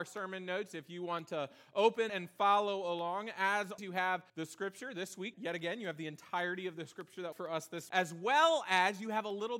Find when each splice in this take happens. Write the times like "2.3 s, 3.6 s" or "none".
2.1 s, 3.8 s, 4.3 s, 5.3 s, 7.3 s, 7.9 s